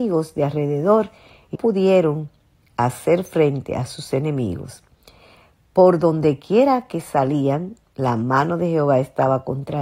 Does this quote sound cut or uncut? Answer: cut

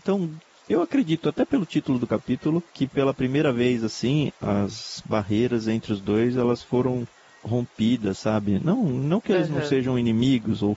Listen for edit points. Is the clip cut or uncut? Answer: cut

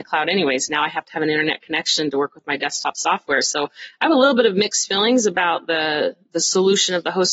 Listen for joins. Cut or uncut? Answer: uncut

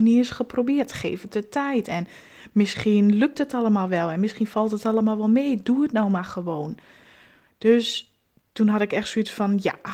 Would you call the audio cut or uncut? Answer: uncut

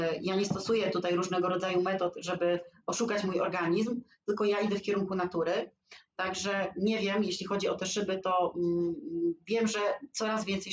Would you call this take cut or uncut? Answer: uncut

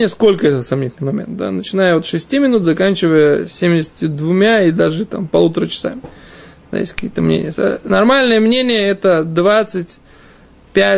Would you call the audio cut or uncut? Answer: uncut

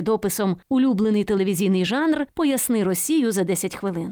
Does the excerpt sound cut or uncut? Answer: uncut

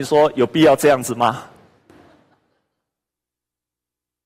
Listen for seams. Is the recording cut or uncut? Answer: uncut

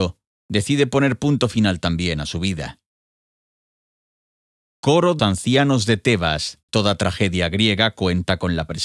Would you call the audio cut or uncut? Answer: cut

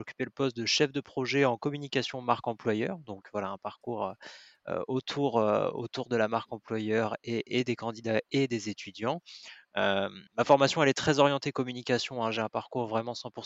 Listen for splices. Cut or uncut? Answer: cut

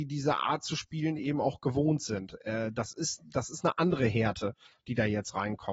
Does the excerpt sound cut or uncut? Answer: uncut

